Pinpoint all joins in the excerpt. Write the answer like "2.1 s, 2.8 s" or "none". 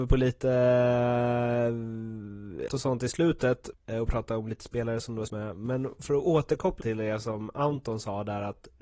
2.7 s, 3.7 s, 5.3 s, 6.8 s